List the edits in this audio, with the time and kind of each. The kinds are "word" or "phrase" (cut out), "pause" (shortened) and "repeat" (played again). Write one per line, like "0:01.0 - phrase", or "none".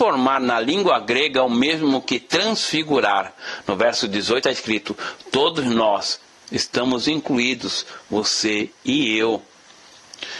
0:04.4 - word
0:06.4 - word